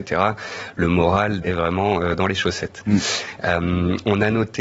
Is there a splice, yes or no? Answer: yes